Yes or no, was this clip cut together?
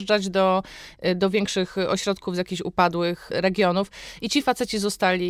no